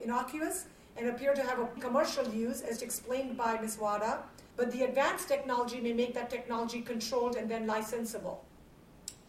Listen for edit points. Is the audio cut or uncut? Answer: cut